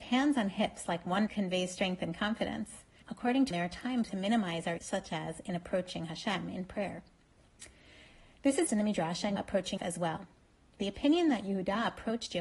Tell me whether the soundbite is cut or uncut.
cut